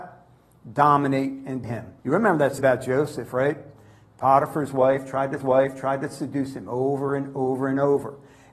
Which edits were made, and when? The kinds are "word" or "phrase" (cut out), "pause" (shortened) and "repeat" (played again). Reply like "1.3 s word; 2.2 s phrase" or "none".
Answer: 1.6 s word; 2.0 s pause; 2.6 s word; 5.4 s repeat